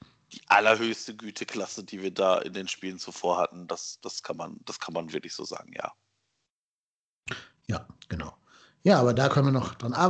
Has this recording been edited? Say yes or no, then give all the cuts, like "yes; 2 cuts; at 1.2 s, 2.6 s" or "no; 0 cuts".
no; 0 cuts